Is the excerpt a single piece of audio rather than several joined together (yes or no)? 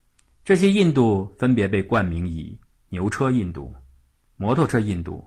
yes